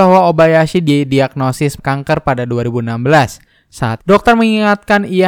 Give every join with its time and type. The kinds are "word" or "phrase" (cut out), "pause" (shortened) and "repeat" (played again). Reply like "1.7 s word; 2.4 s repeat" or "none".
1.8 s word; 4.0 s word